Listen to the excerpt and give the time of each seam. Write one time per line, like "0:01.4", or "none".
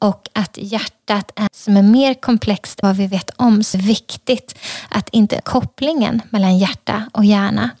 0:01.5
0:02.8
0:03.7
0:05.4